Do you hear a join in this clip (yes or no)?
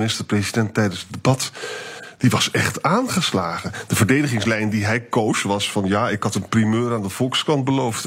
no